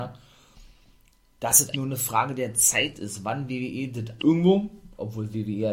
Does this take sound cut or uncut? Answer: cut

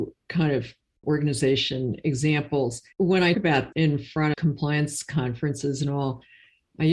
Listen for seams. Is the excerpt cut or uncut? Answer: cut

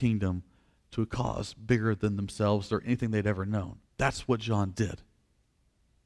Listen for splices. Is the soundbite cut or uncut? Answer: cut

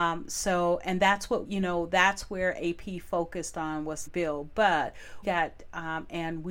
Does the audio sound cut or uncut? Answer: cut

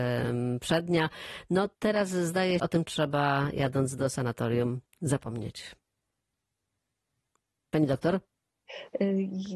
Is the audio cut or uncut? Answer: cut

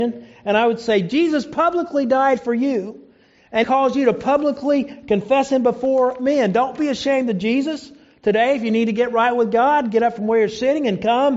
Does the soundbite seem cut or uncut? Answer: cut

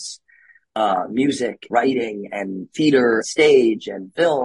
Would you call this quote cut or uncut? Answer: cut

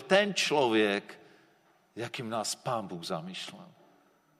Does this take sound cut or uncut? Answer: uncut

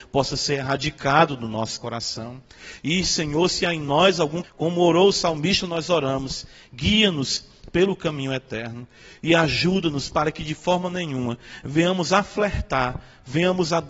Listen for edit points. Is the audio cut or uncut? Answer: cut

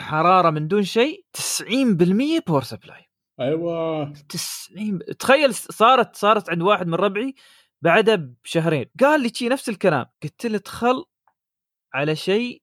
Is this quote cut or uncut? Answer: cut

